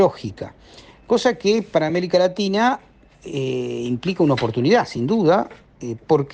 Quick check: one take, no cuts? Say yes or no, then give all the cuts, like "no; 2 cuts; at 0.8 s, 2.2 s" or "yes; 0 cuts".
yes; 0 cuts